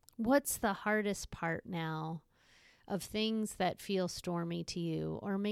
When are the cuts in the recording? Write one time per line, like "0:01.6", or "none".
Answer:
0:01.6